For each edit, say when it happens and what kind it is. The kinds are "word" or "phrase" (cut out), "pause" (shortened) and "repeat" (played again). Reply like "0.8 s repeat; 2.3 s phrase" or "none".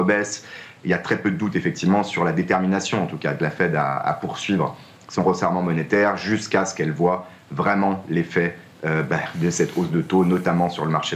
none